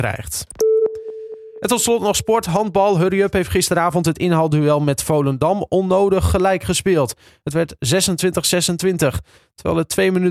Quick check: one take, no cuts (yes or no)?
yes